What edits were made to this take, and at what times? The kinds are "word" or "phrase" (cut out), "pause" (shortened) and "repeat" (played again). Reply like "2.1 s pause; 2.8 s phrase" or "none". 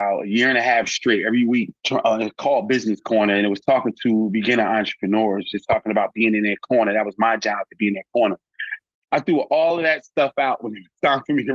1.8 s pause